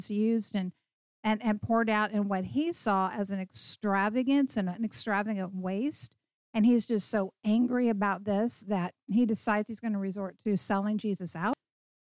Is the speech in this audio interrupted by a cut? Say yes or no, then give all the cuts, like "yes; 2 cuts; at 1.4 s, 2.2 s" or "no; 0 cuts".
no; 0 cuts